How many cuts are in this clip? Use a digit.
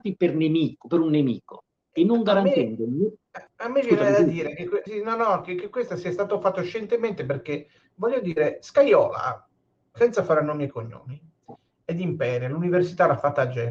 2